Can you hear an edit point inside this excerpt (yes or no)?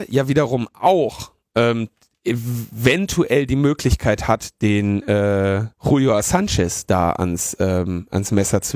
yes